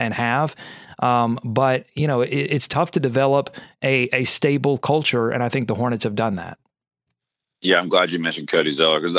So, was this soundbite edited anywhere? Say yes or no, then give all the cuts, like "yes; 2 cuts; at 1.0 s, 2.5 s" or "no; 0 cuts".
no; 0 cuts